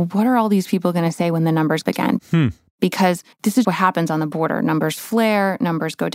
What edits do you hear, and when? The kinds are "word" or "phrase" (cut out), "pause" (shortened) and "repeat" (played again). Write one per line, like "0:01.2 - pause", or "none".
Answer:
0:01.8 - phrase
0:03.3 - pause
0:03.6 - word